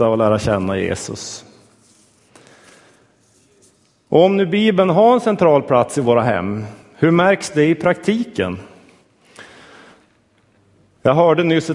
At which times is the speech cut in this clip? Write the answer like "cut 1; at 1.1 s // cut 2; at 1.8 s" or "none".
none